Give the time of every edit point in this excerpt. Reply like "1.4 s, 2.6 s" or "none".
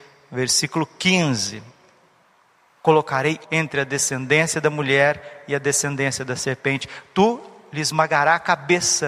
3.4 s